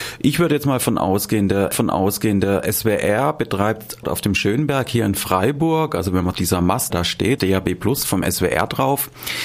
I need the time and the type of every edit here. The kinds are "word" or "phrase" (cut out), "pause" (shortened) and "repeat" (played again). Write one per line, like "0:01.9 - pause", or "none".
0:01.7 - repeat
0:04.0 - phrase
0:06.3 - phrase
0:06.9 - word
0:07.4 - phrase